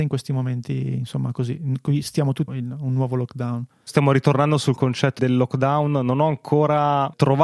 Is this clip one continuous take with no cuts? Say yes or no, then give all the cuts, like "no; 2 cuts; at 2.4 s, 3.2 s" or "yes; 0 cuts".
no; 2 cuts; at 2.5 s, 5.2 s